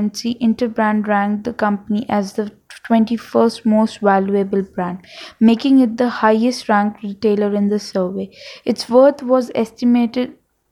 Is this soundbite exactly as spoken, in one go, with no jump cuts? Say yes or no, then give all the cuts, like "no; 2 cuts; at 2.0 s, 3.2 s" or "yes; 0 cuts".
yes; 0 cuts